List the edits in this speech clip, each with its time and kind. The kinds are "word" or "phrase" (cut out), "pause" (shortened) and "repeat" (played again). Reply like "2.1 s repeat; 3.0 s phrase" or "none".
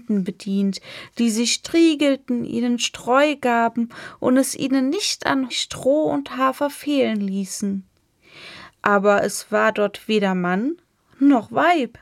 5.5 s word